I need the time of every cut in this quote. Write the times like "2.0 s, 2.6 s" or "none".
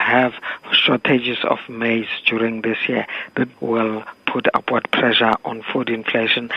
3.5 s